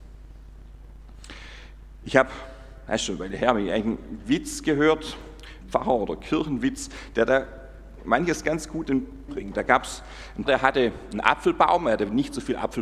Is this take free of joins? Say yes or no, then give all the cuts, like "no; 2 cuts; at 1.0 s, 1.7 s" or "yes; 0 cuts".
no; 4 cuts; at 5.6 s, 8.8 s, 9.3 s, 10.5 s